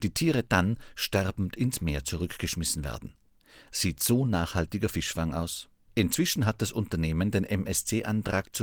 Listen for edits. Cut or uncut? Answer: cut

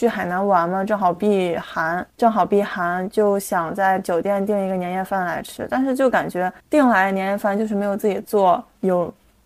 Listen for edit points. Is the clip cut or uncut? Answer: cut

